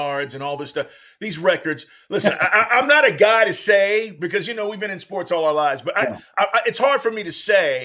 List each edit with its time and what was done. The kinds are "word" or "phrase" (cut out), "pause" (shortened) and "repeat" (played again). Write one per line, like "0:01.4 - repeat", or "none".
none